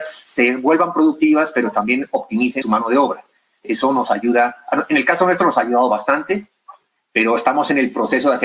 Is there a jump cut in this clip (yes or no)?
yes